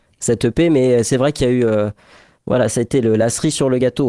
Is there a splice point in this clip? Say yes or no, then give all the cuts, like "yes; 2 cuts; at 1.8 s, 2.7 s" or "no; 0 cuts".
no; 0 cuts